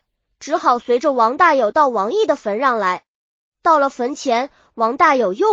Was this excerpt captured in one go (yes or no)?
yes